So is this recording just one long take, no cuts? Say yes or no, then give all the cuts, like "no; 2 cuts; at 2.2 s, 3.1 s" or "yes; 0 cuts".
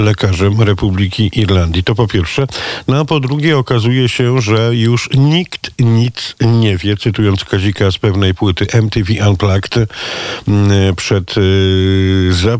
yes; 0 cuts